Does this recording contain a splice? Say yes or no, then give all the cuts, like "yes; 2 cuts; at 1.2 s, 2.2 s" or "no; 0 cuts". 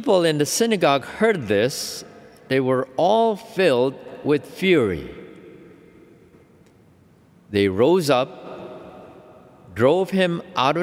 no; 0 cuts